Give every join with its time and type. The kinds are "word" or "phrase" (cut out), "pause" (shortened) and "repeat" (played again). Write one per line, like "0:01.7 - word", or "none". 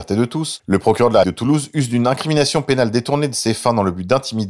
0:01.2 - word